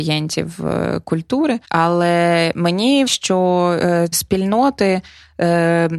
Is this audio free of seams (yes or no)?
no